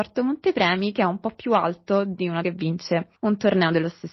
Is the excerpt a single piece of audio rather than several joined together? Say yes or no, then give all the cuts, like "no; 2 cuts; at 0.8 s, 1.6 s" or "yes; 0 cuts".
no; 1 cut; at 2.4 s